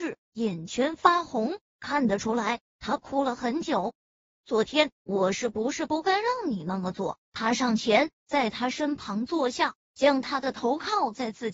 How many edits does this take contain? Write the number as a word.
one